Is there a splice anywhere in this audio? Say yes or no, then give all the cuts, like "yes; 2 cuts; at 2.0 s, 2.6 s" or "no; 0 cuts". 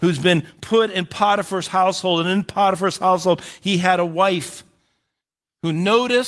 no; 0 cuts